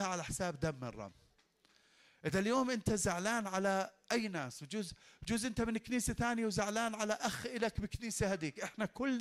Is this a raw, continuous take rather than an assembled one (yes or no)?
yes